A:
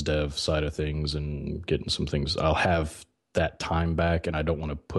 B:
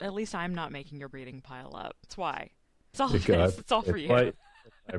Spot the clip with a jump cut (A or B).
B